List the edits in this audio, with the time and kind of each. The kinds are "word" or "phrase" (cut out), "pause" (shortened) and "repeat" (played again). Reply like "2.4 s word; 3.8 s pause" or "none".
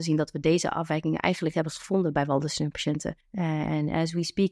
1.5 s word; 3.2 s pause

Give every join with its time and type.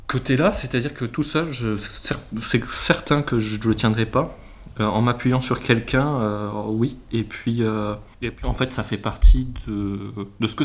8.1 s pause

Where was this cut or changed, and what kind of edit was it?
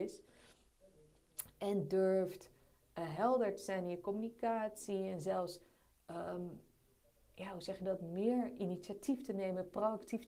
none

